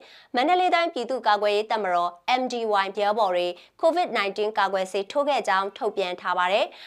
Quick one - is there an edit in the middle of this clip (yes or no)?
yes